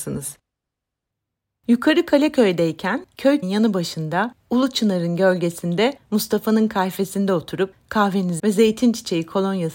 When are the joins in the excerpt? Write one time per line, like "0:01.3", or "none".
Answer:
0:03.4
0:08.4